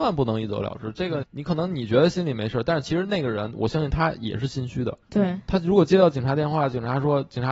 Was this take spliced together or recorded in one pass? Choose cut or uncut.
cut